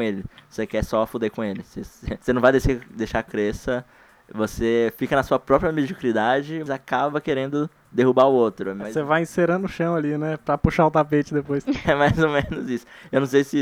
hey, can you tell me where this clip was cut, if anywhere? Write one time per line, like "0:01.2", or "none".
0:03.3
0:06.7
0:11.8